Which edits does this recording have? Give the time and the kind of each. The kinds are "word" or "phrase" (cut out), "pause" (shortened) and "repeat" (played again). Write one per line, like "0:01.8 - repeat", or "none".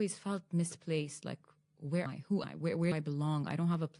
0:02.1 - word
0:02.4 - word
0:02.9 - word